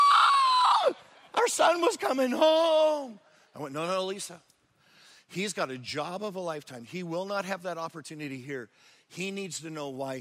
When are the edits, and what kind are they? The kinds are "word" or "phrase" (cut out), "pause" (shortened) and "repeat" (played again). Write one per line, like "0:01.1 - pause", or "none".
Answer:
none